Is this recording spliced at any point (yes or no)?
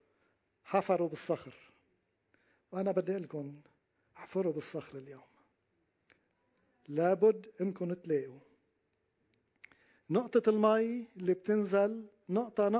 no